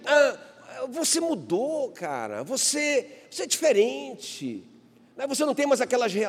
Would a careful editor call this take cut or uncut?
uncut